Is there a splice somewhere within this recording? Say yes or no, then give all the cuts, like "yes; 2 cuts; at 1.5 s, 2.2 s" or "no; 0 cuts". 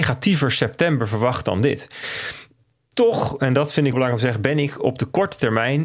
yes; 1 cut; at 3.9 s